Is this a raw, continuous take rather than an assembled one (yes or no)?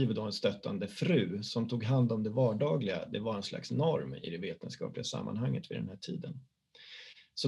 yes